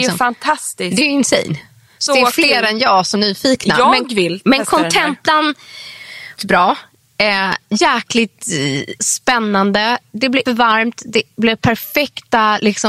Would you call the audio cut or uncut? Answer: cut